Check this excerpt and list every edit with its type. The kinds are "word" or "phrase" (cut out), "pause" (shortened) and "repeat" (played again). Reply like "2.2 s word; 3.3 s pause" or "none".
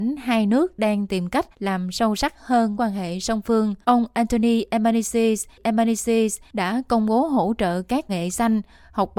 1.5 s pause; 2.7 s word; 3.8 s pause; 5.6 s repeat; 8.1 s phrase